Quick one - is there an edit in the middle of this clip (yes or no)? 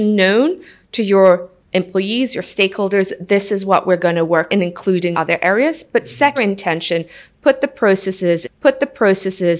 yes